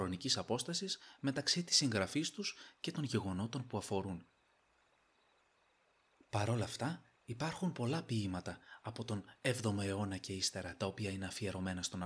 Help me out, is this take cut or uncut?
uncut